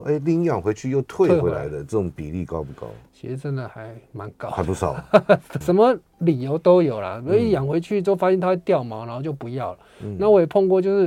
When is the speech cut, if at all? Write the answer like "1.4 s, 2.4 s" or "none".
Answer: 5.6 s